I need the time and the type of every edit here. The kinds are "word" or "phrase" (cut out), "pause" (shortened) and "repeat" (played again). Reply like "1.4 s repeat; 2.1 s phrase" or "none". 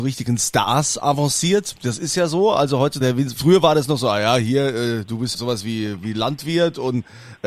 3.0 s word; 5.3 s word